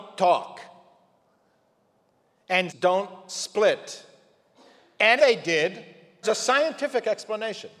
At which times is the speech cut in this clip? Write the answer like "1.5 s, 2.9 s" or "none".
2.7 s, 5.2 s, 6.2 s